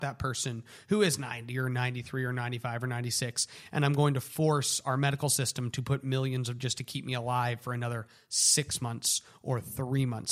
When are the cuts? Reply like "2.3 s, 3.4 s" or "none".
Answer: 6.6 s